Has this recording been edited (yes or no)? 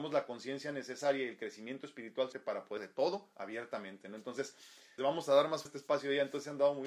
yes